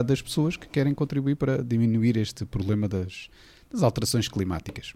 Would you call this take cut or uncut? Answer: uncut